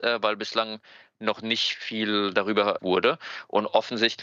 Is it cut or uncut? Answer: cut